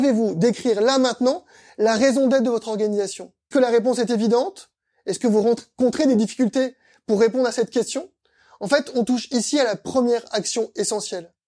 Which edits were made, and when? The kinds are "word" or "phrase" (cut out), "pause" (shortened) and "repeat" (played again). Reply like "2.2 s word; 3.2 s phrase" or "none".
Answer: 3.5 s word